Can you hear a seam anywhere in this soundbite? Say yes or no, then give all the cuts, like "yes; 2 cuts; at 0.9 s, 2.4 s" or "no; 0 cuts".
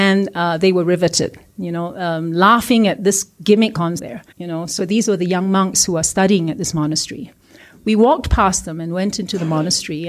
yes; 3 cuts; at 4.0 s, 4.3 s, 4.8 s